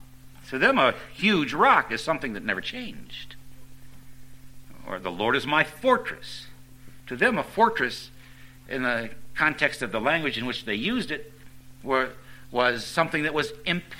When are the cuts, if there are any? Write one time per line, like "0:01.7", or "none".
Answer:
none